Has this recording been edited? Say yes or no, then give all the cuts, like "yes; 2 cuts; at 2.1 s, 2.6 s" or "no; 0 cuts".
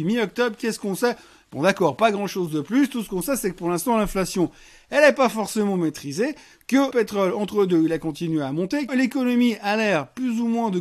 yes; 2 cuts; at 6.9 s, 8.9 s